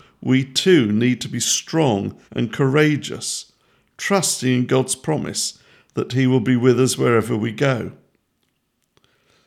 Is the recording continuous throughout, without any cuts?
no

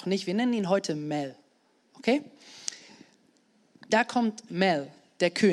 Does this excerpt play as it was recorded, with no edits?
yes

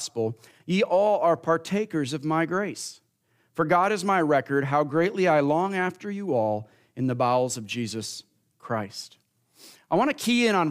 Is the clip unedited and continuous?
yes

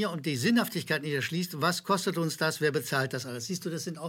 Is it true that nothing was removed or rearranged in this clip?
yes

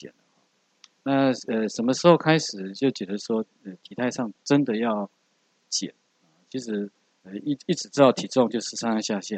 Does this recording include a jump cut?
no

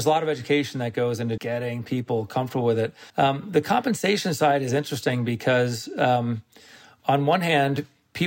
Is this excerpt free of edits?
no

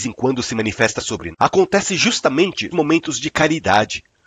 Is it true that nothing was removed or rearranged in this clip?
no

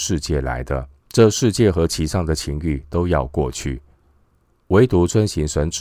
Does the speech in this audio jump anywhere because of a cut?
yes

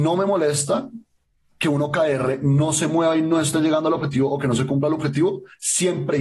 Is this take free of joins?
yes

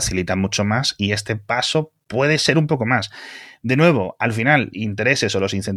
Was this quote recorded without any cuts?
no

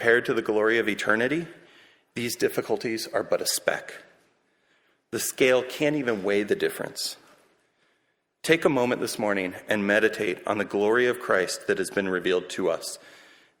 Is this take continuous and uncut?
yes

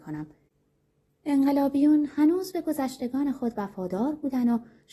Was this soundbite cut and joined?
no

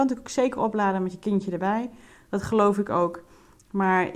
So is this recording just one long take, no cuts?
yes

